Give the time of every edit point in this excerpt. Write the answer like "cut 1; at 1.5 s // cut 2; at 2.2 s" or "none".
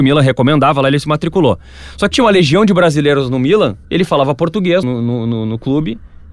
cut 1; at 2.1 s // cut 2; at 3.8 s // cut 3; at 4.8 s